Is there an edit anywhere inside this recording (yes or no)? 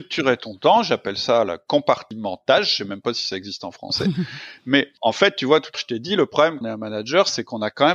yes